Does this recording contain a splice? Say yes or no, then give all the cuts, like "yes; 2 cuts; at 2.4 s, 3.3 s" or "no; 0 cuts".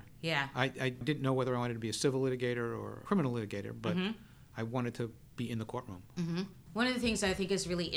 no; 0 cuts